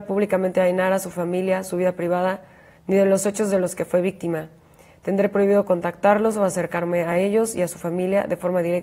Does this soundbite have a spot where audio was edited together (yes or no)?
no